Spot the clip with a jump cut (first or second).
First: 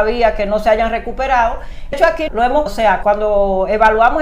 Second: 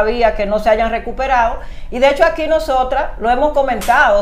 first